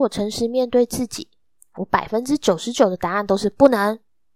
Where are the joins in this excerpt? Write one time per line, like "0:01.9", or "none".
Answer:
none